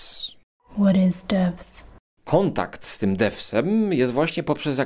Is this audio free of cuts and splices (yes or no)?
yes